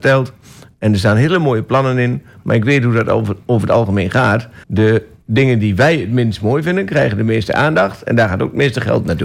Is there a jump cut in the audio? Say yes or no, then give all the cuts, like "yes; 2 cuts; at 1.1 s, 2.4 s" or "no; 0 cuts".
yes; 1 cut; at 4.6 s